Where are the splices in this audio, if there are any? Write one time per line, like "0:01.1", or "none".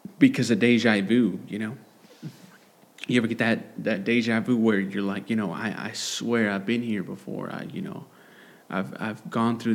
none